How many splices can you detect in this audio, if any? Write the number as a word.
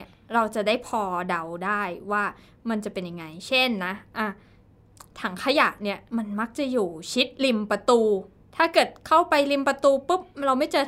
two